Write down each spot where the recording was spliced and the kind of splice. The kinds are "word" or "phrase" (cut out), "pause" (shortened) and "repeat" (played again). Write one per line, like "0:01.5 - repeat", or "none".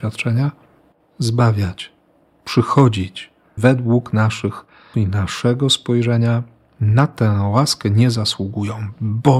0:03.6 - phrase
0:04.9 - word

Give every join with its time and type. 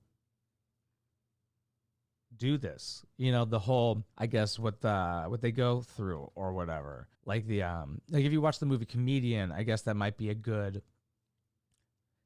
0:04.1 - pause
0:07.1 - pause

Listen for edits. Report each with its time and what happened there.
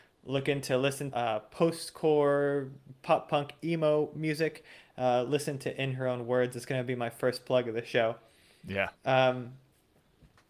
0:01.1 - phrase
0:09.0 - pause

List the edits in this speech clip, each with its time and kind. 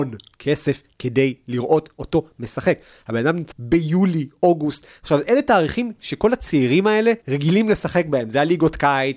0:03.5 - phrase
0:07.2 - pause

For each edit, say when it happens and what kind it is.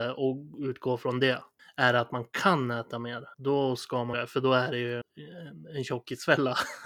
0:01.6 - pause
0:03.3 - pause
0:04.1 - phrase
0:05.0 - word

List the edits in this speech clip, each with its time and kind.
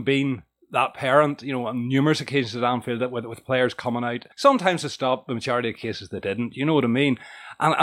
0:04.3 - pause

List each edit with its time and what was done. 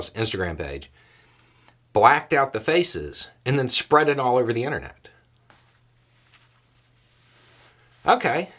none

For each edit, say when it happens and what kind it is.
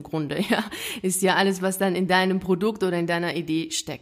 none

